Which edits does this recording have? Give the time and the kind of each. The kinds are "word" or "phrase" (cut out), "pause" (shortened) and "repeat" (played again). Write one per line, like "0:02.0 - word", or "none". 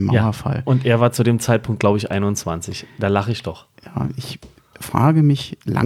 none